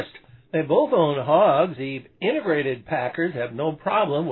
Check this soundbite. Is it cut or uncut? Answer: cut